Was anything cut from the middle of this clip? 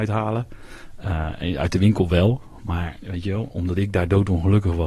no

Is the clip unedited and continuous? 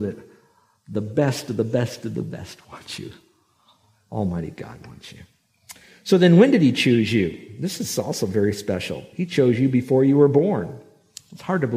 yes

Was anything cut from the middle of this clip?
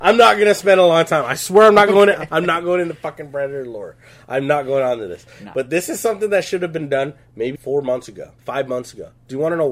yes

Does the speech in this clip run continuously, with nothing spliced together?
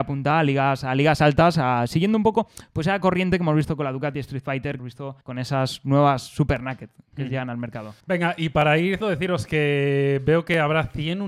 no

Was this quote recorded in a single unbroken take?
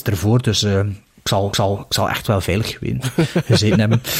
no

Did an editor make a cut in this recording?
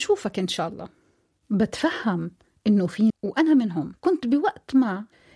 yes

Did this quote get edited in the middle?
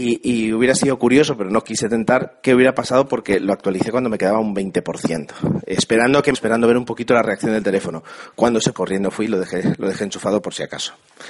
yes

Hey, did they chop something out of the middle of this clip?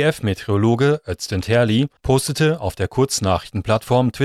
yes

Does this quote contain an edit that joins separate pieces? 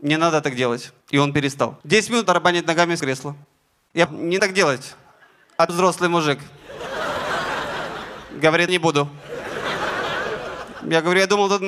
yes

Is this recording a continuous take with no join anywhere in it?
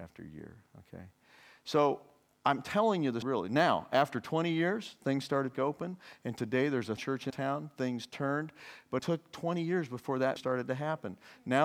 no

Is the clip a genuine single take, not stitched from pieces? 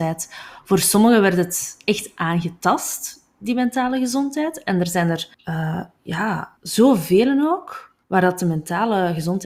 no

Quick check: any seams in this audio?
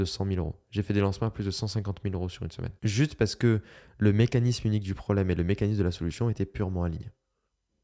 yes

